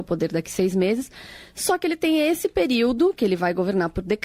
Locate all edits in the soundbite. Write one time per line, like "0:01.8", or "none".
none

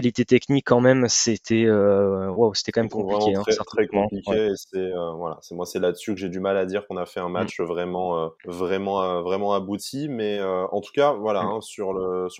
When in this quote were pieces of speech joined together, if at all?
0:08.4

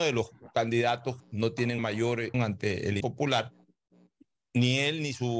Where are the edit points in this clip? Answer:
0:01.2
0:01.8
0:02.3
0:03.0

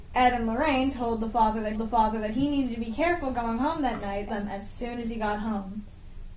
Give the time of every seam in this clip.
0:01.8
0:04.3

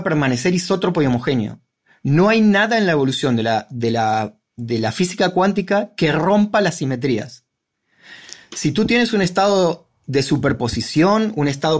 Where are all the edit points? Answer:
none

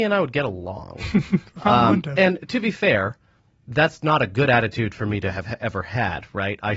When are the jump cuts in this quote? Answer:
none

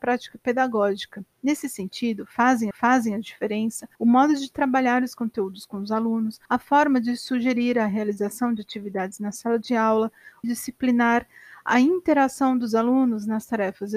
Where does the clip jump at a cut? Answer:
0:01.3
0:02.7
0:03.9
0:06.5
0:10.4

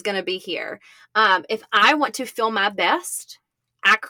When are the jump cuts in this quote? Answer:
none

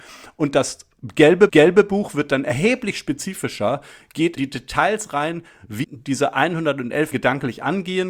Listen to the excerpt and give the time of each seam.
0:01.5
0:04.4
0:05.8
0:07.1

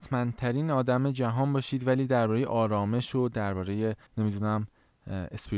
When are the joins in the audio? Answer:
0:04.1

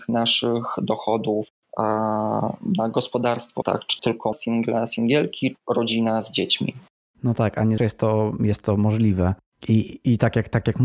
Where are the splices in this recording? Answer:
0:03.6
0:04.0
0:04.3
0:05.5
0:07.8

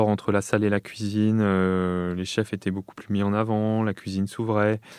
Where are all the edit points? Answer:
none

